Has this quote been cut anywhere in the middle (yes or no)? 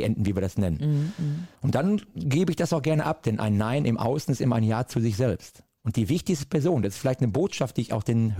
yes